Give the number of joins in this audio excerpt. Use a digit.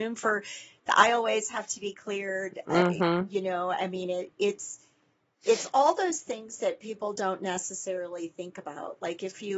0